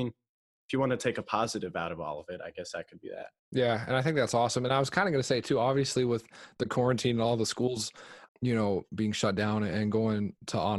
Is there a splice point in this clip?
yes; 2 cuts; at 3.4 s, 8.3 s

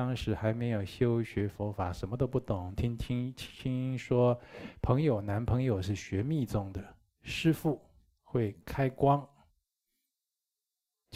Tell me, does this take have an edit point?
no; 0 cuts

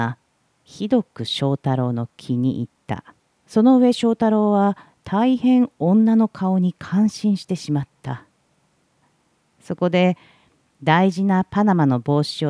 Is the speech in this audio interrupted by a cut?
yes; 1 cut; at 3.2 s

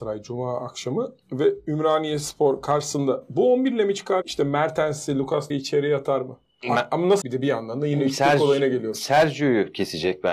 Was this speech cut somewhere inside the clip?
yes; 3 cuts; at 4.2 s, 5.5 s, 7.2 s

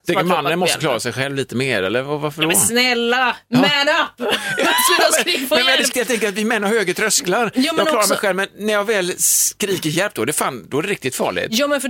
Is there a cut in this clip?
yes; 1 cut; at 5.9 s

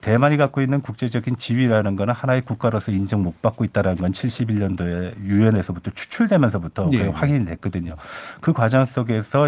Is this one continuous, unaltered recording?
yes; 0 cuts

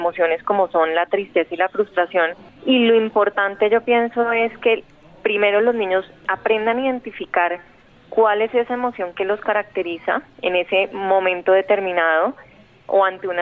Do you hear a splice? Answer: no; 0 cuts

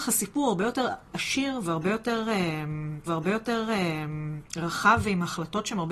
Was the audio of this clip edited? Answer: yes; 1 cut; at 3.1 s

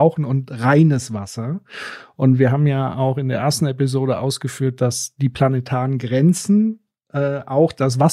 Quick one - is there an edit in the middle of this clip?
no; 0 cuts

